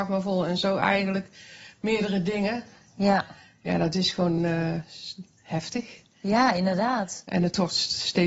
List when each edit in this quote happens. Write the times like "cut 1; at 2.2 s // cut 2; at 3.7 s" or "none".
none